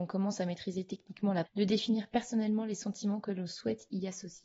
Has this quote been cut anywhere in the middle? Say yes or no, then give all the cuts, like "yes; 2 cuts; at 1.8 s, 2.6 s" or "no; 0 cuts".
yes; 1 cut; at 1.5 s